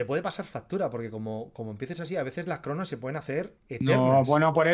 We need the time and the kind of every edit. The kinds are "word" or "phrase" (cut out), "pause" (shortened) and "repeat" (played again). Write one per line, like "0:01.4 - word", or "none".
0:03.6 - pause